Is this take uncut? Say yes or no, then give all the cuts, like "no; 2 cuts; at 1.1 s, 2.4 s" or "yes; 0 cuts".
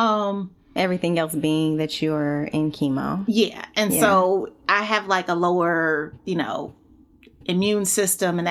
yes; 0 cuts